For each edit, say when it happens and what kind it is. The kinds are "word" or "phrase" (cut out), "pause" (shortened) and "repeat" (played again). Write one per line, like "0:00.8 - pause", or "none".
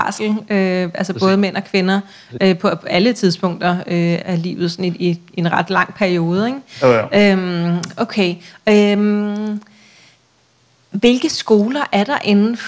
0:04.2 - word